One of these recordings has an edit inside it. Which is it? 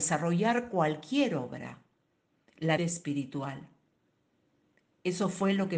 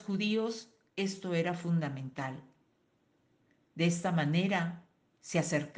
first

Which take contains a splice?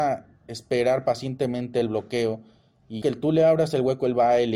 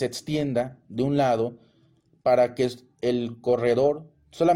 first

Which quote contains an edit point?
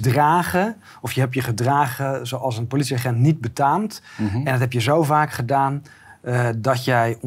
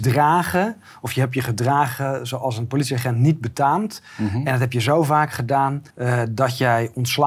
second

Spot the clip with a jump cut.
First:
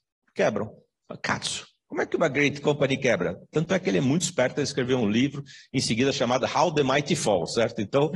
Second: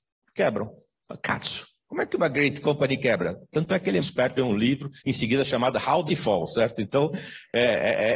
second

